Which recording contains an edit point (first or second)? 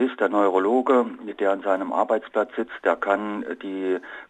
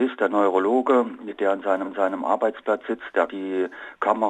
second